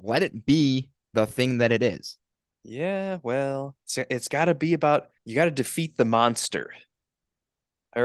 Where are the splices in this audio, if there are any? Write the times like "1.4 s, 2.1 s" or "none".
2.3 s, 3.8 s, 5.2 s

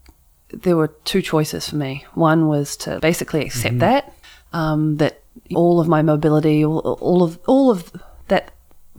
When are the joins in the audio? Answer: 3.0 s, 4.2 s, 5.5 s

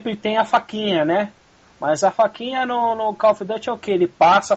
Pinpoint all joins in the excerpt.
none

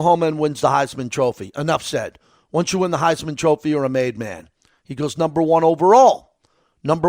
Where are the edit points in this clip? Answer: none

